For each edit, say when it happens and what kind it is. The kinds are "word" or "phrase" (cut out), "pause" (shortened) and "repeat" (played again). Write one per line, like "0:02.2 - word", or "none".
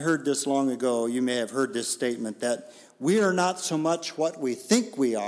none